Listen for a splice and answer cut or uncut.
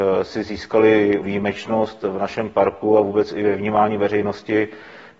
cut